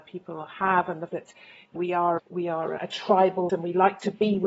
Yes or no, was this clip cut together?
yes